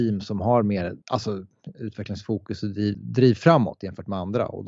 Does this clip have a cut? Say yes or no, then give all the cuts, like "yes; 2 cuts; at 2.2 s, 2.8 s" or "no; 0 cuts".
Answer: yes; 2 cuts; at 1.0 s, 2.9 s